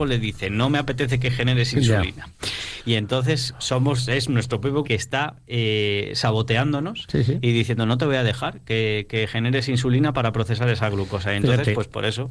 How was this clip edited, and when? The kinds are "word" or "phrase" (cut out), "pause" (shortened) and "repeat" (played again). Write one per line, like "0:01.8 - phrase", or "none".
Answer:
0:04.8 - phrase